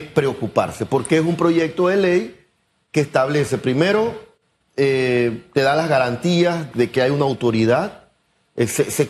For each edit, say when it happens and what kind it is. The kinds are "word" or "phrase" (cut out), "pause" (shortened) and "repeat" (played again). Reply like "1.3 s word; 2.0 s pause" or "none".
6.7 s word